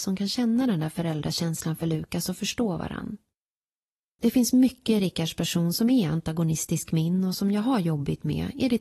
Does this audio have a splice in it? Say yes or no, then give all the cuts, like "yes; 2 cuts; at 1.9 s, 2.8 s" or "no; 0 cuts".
no; 0 cuts